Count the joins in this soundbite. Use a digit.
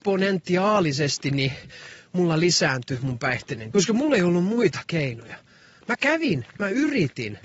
1